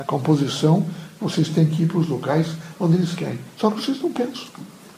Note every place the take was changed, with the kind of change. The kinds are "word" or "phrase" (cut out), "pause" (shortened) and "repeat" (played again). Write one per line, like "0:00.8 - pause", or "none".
0:03.5 - pause